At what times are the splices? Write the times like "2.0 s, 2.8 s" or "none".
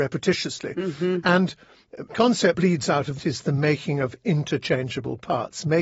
2.1 s, 2.5 s, 3.2 s